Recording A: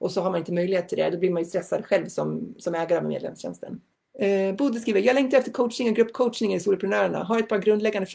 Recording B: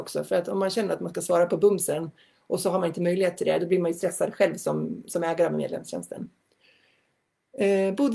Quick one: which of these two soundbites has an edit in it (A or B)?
A